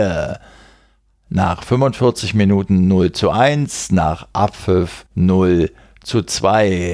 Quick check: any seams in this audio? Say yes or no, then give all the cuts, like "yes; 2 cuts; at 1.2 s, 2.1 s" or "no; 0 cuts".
yes; 1 cut; at 5.1 s